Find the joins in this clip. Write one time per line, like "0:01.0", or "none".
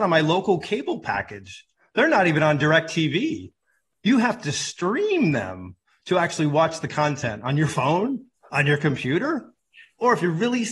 none

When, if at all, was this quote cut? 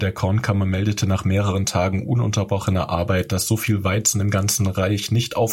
none

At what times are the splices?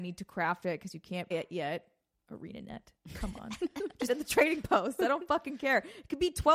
0:01.3
0:02.1
0:04.1

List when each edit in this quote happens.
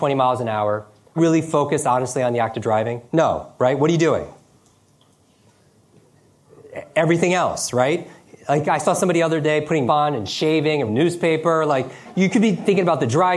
0:01.2
0:03.1
0:09.9
0:10.9

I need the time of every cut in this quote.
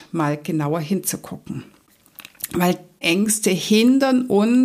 0:03.0

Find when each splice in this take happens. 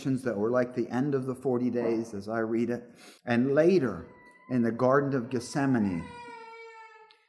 0:03.2

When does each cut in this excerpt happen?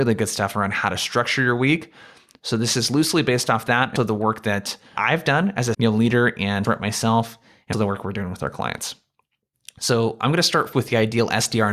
0:04.0
0:05.0
0:05.7
0:06.6
0:07.7
0:10.7

